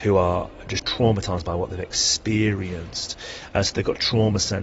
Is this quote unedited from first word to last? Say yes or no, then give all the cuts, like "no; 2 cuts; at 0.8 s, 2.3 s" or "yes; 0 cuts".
yes; 0 cuts